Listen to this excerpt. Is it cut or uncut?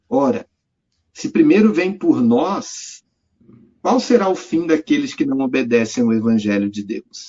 uncut